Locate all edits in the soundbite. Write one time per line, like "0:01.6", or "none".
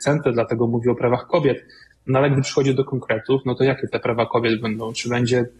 none